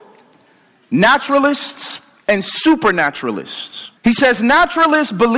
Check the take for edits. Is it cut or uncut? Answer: cut